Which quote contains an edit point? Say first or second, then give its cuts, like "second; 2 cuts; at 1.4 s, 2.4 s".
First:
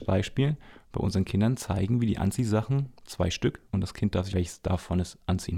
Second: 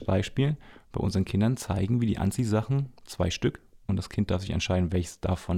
first; 2 cuts; at 3.7 s, 4.3 s